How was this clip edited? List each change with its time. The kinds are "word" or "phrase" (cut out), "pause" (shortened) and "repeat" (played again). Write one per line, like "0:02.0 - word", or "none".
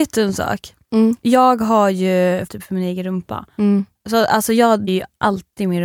0:02.5 - word
0:04.9 - word